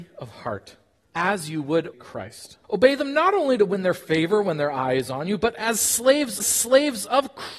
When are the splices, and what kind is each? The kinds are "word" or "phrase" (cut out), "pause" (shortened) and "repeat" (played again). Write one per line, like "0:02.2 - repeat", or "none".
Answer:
0:01.0 - word
0:01.9 - word
0:02.6 - pause
0:06.4 - repeat